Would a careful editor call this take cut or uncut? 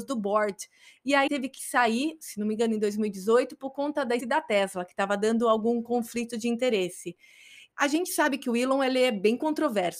cut